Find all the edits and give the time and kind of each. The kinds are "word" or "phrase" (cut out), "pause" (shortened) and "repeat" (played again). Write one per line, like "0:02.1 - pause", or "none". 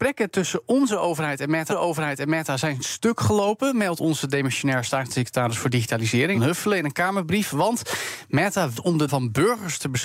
0:01.7 - repeat
0:06.3 - phrase
0:08.7 - word
0:09.1 - word